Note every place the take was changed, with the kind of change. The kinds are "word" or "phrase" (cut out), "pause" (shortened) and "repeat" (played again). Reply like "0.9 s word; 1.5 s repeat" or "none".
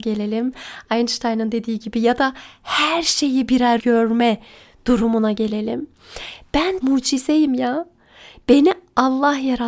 3.8 s phrase; 6.8 s word